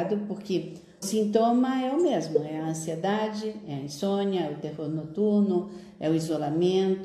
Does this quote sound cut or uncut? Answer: cut